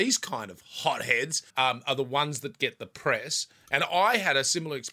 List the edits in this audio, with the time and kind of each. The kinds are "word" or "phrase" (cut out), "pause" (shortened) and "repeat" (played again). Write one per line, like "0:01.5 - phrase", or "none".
0:01.5 - pause